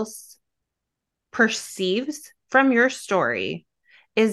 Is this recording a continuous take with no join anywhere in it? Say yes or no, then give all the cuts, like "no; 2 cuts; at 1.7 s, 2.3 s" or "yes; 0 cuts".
yes; 0 cuts